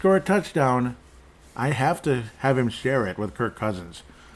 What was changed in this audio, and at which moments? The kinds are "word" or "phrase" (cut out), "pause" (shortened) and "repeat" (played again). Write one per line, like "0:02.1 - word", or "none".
none